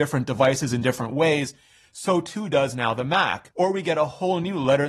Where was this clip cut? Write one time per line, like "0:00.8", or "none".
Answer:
none